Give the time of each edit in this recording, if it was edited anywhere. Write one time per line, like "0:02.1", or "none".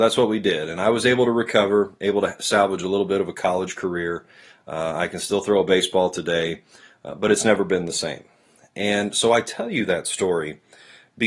none